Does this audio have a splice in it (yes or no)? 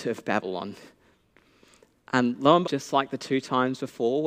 yes